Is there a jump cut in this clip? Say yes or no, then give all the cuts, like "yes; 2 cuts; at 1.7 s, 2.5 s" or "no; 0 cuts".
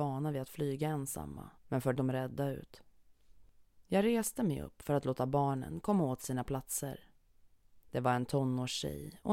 yes; 3 cuts; at 1.6 s, 2.0 s, 7.8 s